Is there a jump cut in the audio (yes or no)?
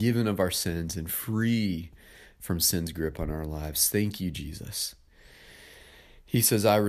no